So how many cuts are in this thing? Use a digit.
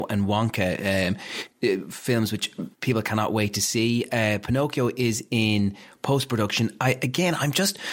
0